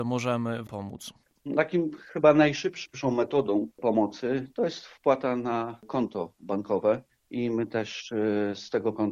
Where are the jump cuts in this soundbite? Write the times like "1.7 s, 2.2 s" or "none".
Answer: none